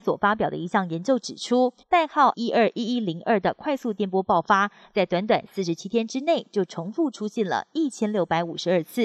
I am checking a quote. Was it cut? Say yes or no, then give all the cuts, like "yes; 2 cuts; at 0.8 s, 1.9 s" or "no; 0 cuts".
yes; 2 cuts; at 1.8 s, 2.3 s